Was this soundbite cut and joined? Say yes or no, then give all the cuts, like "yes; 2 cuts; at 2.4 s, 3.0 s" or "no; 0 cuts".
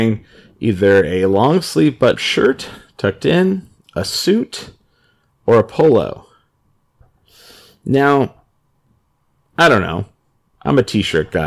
yes; 1 cut; at 2.1 s